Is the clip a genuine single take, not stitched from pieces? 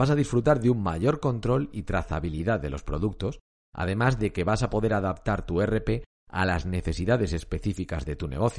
yes; 0 cuts

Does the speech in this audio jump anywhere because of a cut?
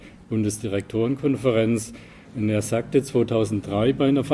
no; 0 cuts

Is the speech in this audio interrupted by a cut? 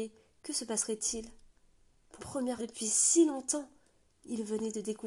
yes; 2 cuts; at 2.2 s, 2.6 s

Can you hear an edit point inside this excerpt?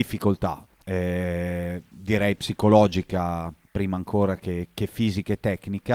no; 0 cuts

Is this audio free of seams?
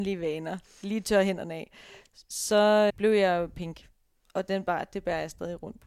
no; 1 cut; at 2.9 s

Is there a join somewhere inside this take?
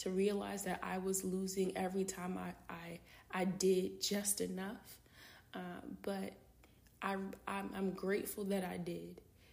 no; 0 cuts

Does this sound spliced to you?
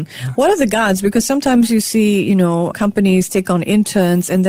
no; 0 cuts

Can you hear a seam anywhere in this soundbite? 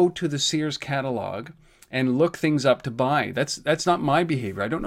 no; 0 cuts

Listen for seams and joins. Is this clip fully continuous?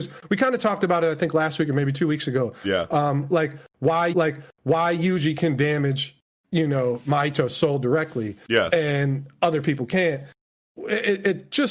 no; 1 cut; at 4.1 s

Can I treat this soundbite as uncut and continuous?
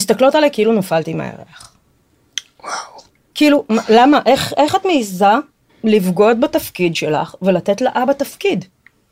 no; 1 cut; at 5.7 s

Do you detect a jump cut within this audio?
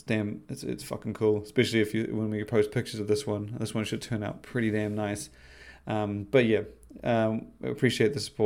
no; 0 cuts

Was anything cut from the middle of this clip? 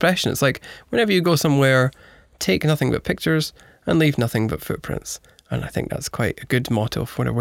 no; 0 cuts

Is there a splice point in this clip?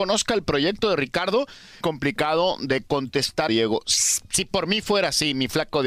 yes; 2 cuts; at 1.8 s, 3.5 s

